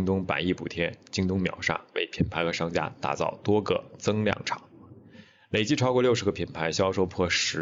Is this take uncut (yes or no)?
yes